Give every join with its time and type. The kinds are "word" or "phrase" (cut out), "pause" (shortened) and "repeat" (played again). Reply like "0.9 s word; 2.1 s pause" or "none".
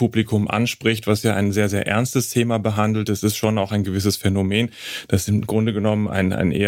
none